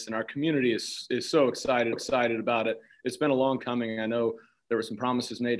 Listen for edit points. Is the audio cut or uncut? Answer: cut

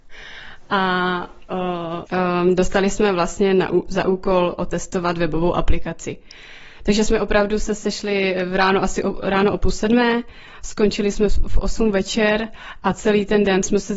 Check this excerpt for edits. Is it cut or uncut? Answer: cut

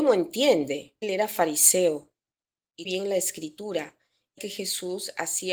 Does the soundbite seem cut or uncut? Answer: cut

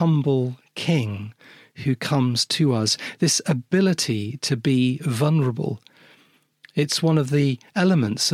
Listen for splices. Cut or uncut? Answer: uncut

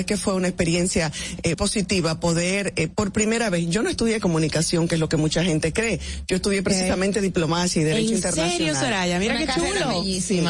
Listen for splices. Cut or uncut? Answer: cut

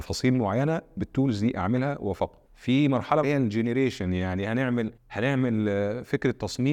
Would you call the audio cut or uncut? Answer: cut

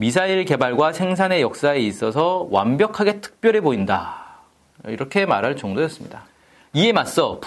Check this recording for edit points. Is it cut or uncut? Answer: uncut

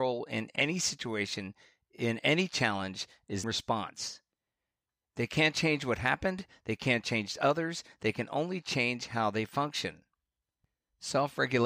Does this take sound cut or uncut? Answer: cut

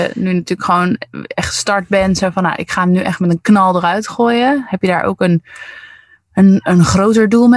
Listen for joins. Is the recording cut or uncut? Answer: uncut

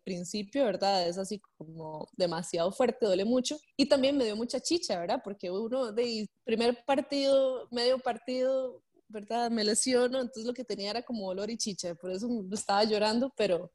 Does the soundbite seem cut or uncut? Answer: uncut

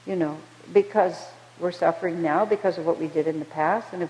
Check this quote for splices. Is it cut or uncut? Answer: uncut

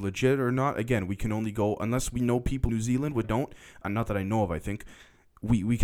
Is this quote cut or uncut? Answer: cut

